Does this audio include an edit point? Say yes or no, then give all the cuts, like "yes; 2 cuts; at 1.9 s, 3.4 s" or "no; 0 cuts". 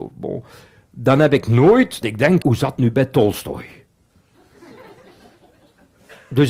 yes; 4 cuts; at 1.4 s, 2.0 s, 2.4 s, 2.8 s